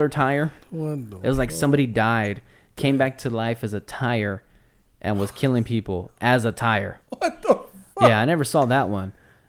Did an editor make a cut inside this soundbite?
no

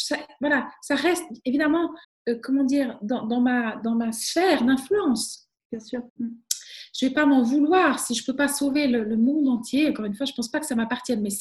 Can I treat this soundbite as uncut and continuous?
no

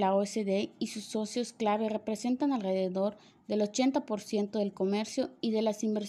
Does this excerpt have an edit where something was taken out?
no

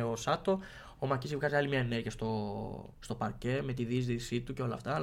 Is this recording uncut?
yes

